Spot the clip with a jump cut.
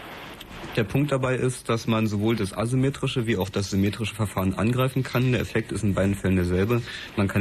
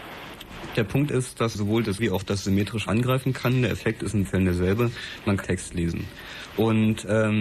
second; 6 cuts; at 1.1 s, 1.5 s, 2.0 s, 2.9 s, 4.2 s, 5.4 s

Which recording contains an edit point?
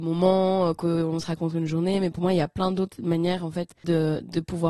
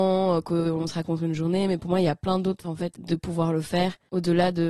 second; 2 cuts; at 2.6 s, 3.0 s

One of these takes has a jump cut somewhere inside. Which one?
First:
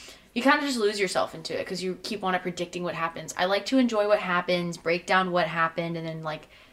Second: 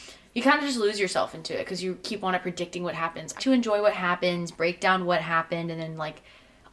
second; 1 cut; at 3.4 s

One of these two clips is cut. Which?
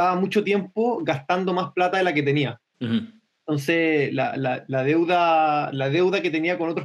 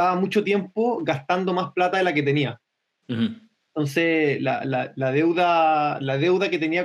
first; 1 cut; at 2.7 s

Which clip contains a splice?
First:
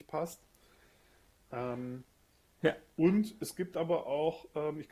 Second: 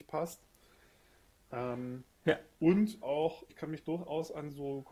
second; 3 cuts; at 2.1 s, 3.0 s, 3.5 s

